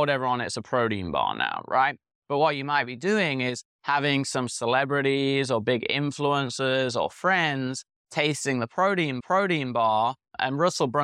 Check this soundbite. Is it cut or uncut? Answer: cut